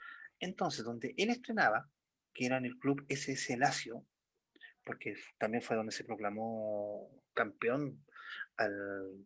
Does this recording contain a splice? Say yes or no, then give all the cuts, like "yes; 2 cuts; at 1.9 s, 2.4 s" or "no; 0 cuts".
no; 0 cuts